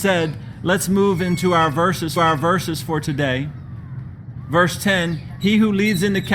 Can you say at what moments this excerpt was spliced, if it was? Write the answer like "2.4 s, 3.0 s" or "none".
2.2 s